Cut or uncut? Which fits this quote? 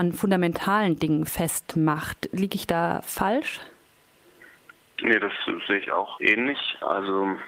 uncut